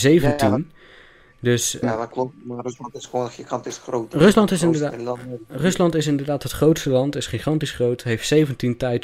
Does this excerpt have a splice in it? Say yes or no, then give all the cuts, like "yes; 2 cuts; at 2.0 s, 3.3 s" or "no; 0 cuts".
yes; 1 cut; at 1.8 s